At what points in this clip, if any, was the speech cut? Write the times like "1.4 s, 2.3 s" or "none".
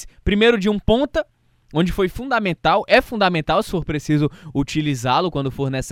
none